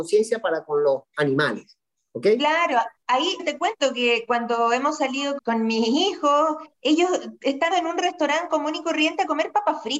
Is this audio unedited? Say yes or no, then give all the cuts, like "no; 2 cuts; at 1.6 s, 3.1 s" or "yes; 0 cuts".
no; 4 cuts; at 3.4 s, 5.4 s, 6.7 s, 7.7 s